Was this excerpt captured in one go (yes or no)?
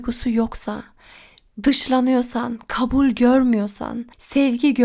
yes